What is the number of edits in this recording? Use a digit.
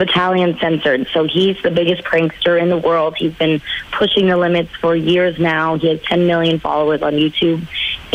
0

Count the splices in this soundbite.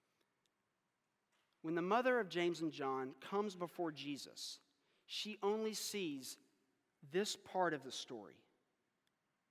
0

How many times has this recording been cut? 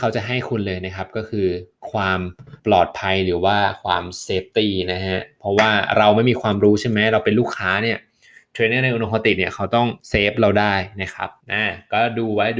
3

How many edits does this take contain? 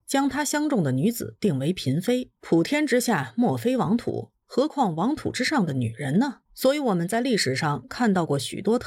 3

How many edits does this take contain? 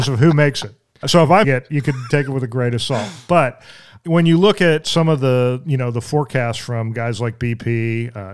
3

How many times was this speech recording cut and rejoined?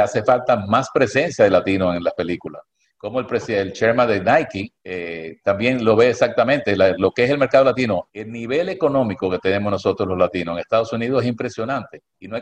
0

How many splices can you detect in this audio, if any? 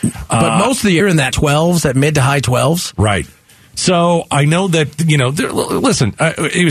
2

